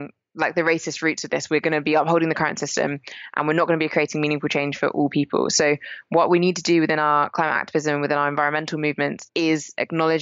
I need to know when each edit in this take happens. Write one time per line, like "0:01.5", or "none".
none